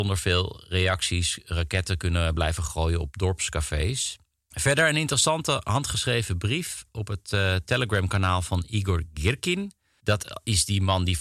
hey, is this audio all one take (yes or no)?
yes